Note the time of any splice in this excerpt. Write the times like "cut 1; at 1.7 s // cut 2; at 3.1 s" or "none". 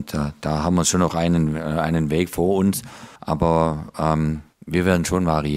cut 1; at 3.2 s // cut 2; at 4.5 s

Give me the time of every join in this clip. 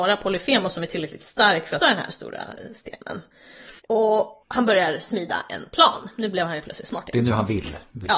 cut 1; at 1.8 s // cut 2; at 3.8 s

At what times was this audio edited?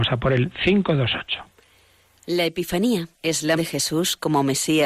cut 1; at 3.1 s // cut 2; at 3.6 s

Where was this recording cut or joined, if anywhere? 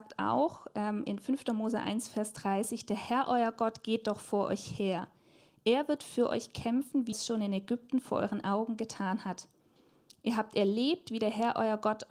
cut 1; at 7.1 s

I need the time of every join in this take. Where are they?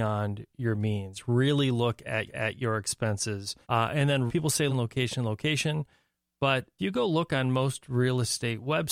cut 1; at 2.3 s // cut 2; at 3.6 s // cut 3; at 4.3 s // cut 4; at 4.7 s // cut 5; at 6.8 s

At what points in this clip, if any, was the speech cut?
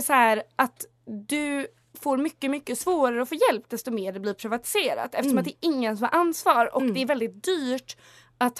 none

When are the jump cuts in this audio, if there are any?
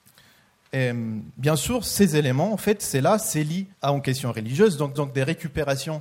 cut 1; at 3.7 s // cut 2; at 5.0 s

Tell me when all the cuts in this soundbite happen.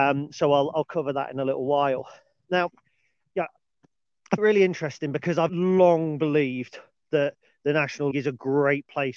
cut 1; at 4.4 s // cut 2; at 5.5 s // cut 3; at 8.1 s

